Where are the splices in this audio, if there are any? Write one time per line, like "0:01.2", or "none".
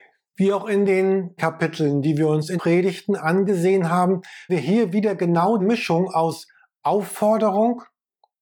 0:01.4
0:02.6
0:04.5
0:05.6